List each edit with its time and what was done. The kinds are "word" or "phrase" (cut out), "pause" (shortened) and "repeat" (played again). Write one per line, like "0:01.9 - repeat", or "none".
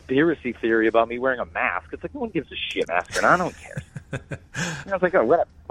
0:02.8 - phrase